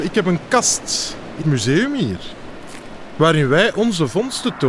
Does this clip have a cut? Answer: yes; 1 cut; at 1.4 s

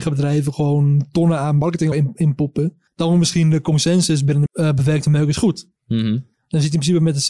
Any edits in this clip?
yes; 3 cuts; at 1.9 s, 2.9 s, 4.5 s

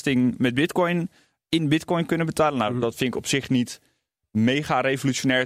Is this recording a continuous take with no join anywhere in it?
yes; 0 cuts

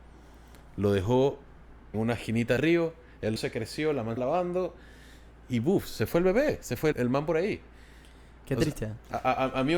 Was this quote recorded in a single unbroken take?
no; 6 cuts; at 1.9 s, 2.6 s, 3.4 s, 4.2 s, 6.1 s, 6.9 s

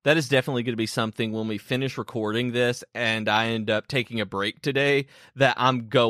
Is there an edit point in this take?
no; 0 cuts

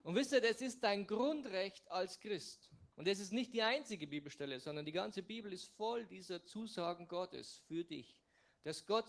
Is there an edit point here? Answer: yes; 1 cut; at 2.9 s

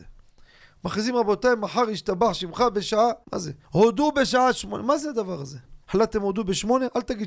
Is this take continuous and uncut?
no; 3 cuts; at 3.2 s, 3.6 s, 5.8 s

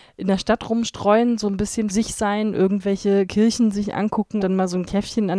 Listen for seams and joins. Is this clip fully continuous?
no; 2 cuts; at 1.9 s, 4.4 s

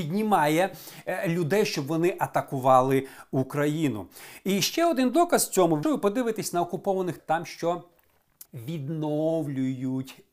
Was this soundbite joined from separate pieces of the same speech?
yes; 3 cuts; at 5.8 s, 7.2 s, 8.5 s

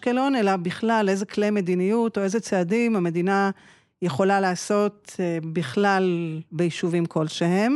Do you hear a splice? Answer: no; 0 cuts

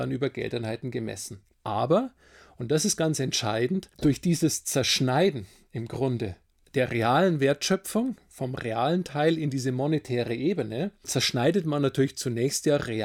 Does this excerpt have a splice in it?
no; 0 cuts

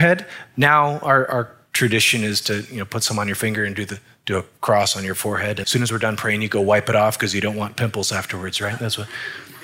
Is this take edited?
yes; 1 cut; at 5.6 s

